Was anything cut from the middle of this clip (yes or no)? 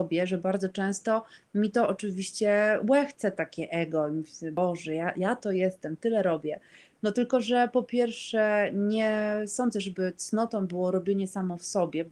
no